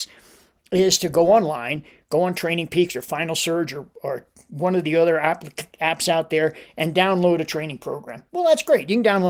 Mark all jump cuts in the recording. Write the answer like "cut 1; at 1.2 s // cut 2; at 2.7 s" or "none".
none

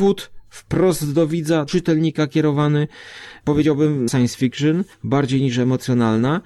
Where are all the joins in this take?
cut 1; at 1.7 s // cut 2; at 4.1 s // cut 3; at 4.9 s

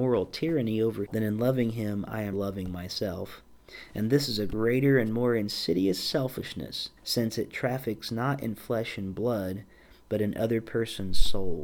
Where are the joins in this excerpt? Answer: cut 1; at 1.1 s // cut 2; at 2.3 s // cut 3; at 7.0 s

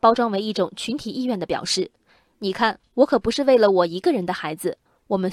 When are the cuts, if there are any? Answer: none

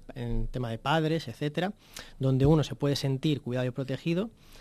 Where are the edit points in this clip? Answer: none

